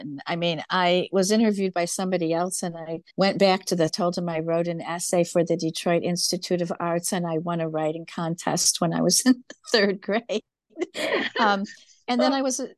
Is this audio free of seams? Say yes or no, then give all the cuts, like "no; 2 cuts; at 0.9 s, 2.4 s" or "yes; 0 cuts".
no; 2 cuts; at 3.1 s, 3.9 s